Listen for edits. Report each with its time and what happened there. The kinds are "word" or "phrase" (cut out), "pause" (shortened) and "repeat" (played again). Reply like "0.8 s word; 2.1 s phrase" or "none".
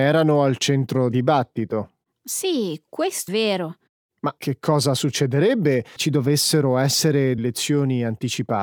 1.1 s word; 3.3 s word; 4.4 s word; 6.0 s word; 7.4 s word